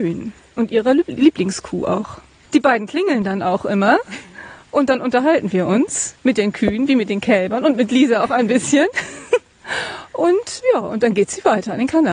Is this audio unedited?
yes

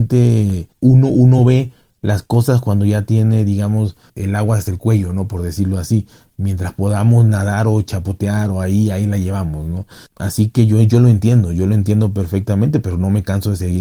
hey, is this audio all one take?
yes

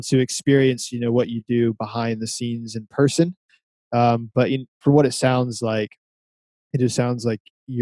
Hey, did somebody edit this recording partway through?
no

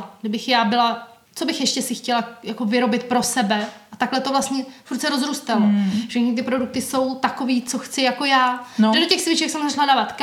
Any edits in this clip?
yes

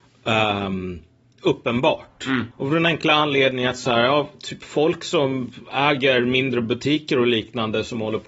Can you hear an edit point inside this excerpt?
yes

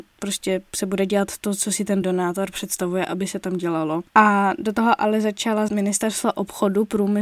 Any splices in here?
yes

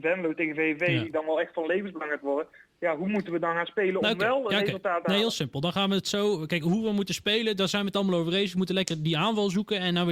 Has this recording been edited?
no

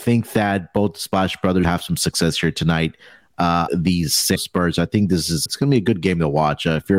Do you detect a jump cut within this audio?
yes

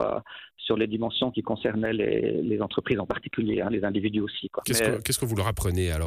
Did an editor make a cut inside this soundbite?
yes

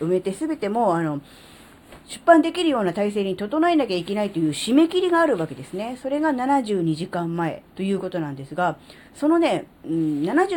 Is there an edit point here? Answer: yes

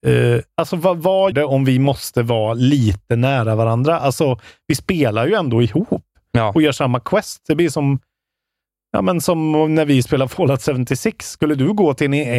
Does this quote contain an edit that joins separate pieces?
yes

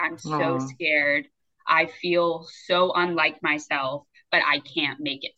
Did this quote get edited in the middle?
no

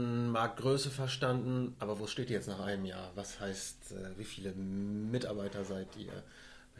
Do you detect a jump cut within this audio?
no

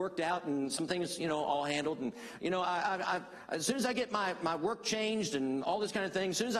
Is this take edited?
no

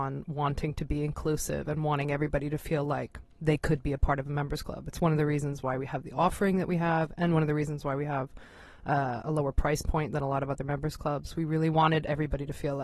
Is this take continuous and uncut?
yes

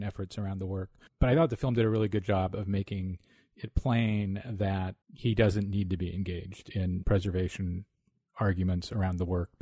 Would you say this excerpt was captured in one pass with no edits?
no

